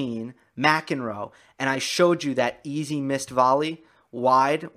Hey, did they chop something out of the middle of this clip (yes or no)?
no